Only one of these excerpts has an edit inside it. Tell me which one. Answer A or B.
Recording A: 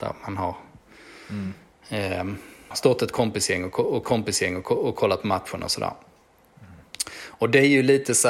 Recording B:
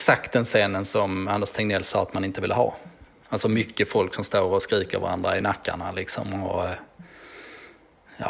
A